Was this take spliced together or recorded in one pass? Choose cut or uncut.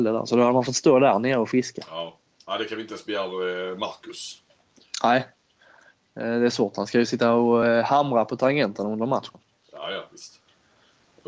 uncut